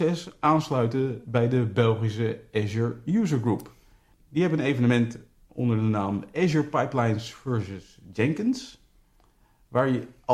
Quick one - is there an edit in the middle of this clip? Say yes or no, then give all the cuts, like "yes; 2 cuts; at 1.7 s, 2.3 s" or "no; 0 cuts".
no; 0 cuts